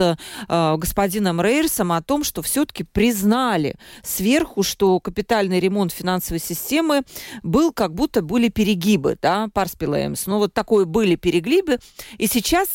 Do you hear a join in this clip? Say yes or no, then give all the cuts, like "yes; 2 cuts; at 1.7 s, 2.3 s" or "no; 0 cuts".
no; 0 cuts